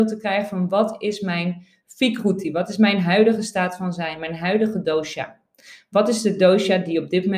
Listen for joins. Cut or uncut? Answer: uncut